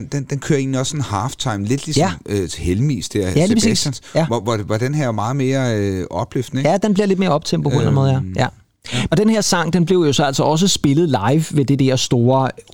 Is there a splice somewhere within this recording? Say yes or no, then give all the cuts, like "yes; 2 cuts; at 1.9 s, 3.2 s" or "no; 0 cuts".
no; 0 cuts